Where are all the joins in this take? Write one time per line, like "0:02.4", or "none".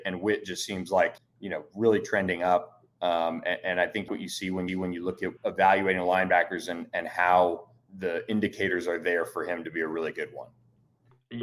0:01.2
0:04.1
0:04.7
0:05.4
0:07.9